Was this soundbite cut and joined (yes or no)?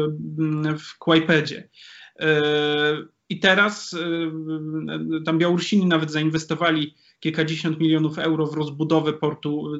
no